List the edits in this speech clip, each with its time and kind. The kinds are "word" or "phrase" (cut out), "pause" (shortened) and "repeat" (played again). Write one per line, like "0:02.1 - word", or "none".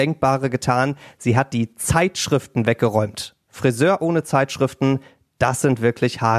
none